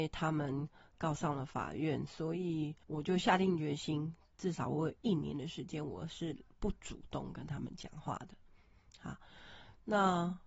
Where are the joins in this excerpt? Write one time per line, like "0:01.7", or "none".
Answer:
0:02.8

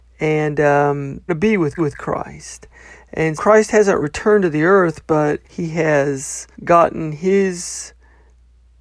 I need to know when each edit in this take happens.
0:01.3
0:01.8
0:03.4
0:04.0
0:05.4
0:06.5

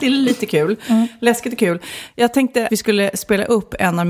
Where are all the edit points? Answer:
0:02.7

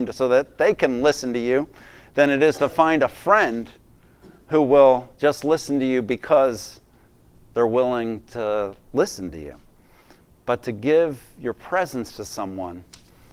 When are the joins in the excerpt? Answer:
none

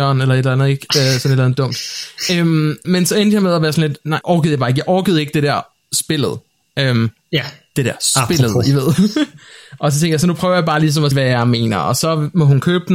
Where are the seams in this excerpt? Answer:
0:02.8
0:04.2
0:11.1

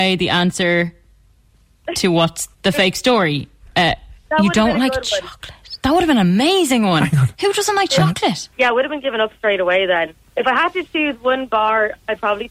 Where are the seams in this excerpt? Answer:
0:02.5
0:08.5

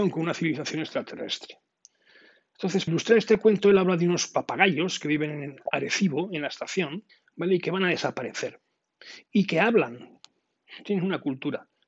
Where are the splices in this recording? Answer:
0:02.9
0:07.1

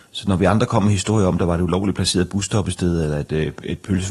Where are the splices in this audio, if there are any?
none

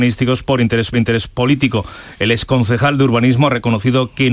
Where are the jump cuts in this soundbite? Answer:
0:00.9

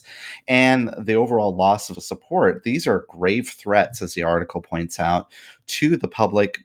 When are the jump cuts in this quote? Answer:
0:01.9

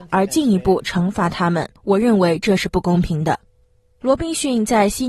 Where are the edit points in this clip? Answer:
0:01.8
0:03.5

